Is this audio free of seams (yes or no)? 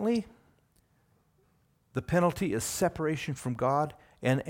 yes